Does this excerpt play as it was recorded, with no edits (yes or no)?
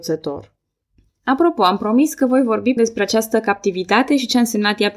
no